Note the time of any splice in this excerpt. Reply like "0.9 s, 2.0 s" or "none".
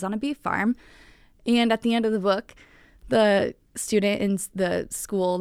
none